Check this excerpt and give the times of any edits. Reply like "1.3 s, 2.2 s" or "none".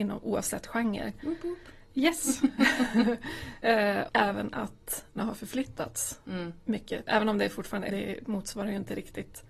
4.1 s, 5.2 s, 7.1 s, 7.9 s